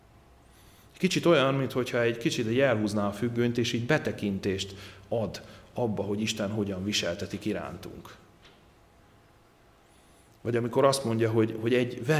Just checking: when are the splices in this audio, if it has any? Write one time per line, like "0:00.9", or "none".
none